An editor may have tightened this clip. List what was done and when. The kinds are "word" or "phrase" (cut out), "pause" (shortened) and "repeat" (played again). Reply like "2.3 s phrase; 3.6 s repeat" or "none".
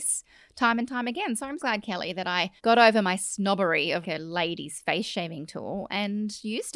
1.6 s word; 2.6 s pause; 4.0 s word